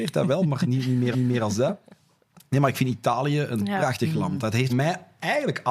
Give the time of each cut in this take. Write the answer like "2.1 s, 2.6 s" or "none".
1.1 s, 4.7 s